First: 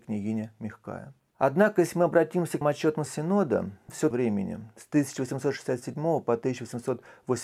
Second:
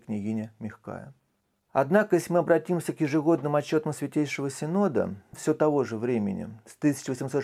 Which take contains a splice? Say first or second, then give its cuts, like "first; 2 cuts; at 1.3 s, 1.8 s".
first; 4 cuts; at 1.3 s, 2.6 s, 3.1 s, 4.1 s